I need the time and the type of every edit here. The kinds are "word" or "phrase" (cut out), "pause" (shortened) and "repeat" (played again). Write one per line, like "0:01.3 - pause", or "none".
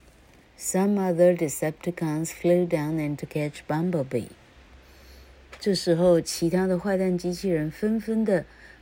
0:03.2 - word